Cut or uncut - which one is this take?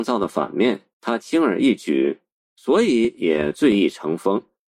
cut